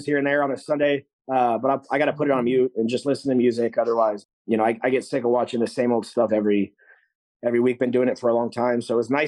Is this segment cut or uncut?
uncut